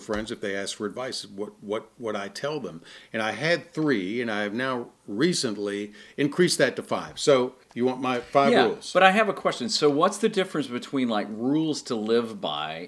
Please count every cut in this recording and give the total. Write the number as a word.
two